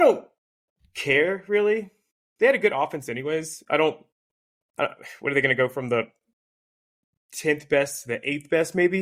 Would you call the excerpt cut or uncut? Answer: uncut